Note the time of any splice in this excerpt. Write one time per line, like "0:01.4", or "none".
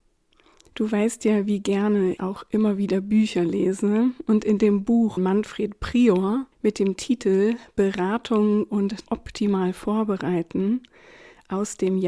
0:02.2
0:05.2
0:06.5
0:09.1